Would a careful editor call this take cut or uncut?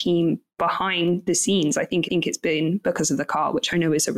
cut